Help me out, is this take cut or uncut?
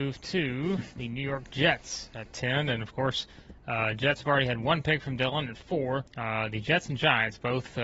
cut